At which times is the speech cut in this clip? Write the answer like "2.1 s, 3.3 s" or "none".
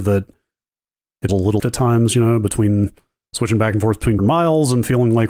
1.3 s, 1.6 s, 4.2 s